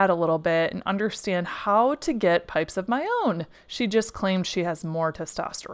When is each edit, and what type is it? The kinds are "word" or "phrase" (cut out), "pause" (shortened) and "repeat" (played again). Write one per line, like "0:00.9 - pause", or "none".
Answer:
0:03.5 - pause